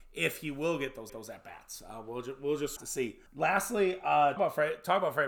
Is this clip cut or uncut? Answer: cut